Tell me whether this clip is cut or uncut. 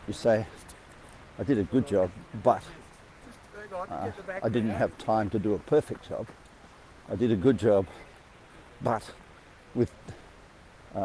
uncut